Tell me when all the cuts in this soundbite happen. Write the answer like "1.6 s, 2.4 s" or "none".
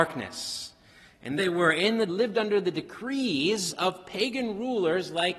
1.4 s, 2.1 s